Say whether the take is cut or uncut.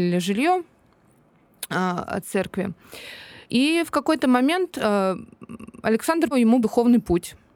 cut